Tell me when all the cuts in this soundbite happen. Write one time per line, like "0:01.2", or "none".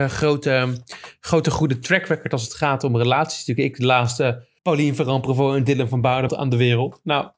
0:04.6
0:06.3